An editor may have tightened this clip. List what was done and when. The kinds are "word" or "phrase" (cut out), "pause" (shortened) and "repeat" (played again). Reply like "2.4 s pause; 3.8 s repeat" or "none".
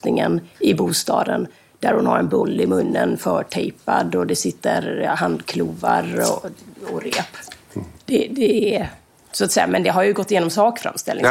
8.0 s pause